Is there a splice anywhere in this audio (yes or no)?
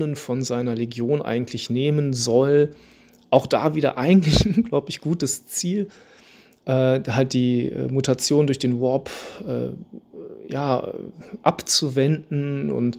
no